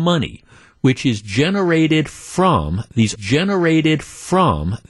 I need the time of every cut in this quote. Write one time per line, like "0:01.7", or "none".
0:03.2